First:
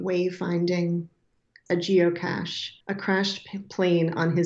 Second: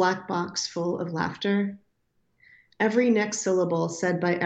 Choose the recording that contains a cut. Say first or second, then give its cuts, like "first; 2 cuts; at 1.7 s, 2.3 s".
first; 2 cuts; at 1.7 s, 2.8 s